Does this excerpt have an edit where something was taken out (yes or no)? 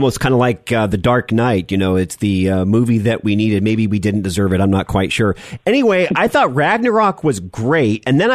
no